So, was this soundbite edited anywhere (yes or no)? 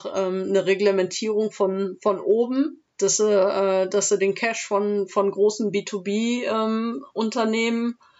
yes